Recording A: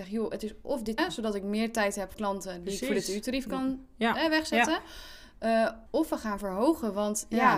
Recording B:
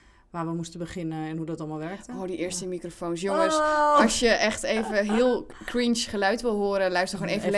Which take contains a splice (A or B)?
A